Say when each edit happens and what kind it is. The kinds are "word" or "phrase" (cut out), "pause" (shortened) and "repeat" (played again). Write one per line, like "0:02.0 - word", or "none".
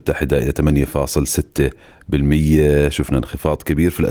none